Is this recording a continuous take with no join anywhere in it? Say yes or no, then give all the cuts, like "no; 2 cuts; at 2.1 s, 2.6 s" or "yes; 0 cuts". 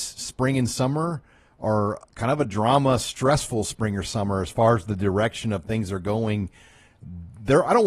yes; 0 cuts